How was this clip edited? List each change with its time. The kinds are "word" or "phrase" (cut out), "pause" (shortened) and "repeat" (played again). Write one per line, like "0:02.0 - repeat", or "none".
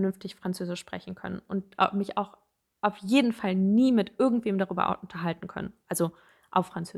none